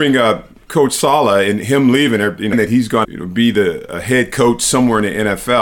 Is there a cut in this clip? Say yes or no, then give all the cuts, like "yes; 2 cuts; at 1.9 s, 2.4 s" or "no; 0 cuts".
yes; 2 cuts; at 2.5 s, 3.0 s